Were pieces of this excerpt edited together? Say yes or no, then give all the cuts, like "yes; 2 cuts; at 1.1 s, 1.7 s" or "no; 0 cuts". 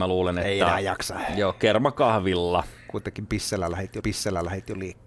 yes; 1 cut; at 4.0 s